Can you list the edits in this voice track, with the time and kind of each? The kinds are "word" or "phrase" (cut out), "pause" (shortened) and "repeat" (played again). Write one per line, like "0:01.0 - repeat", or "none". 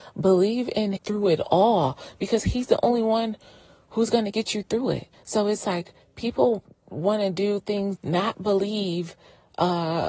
0:01.0 - word
0:05.1 - pause
0:08.0 - word